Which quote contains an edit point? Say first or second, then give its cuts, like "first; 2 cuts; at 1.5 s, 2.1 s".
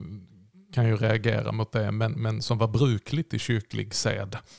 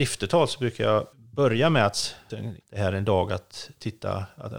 second; 3 cuts; at 1.1 s, 2.3 s, 2.6 s